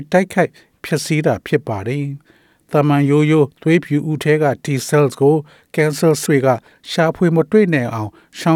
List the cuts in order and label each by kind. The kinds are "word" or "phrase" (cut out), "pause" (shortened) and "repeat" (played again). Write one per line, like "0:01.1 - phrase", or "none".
0:03.5 - pause
0:06.3 - word